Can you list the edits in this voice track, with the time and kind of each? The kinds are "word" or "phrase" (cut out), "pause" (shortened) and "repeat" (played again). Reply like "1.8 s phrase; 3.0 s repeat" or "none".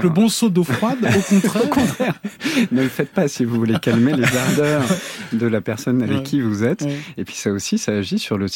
none